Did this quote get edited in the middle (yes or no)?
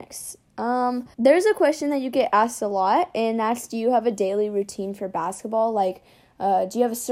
yes